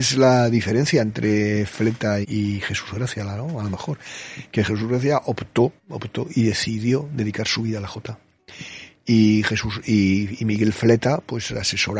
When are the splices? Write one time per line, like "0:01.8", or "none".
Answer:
0:02.2
0:05.8